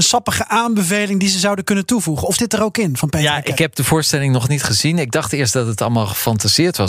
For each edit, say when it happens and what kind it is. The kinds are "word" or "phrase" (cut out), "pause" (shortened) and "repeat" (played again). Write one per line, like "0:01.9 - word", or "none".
0:02.4 - word
0:03.6 - word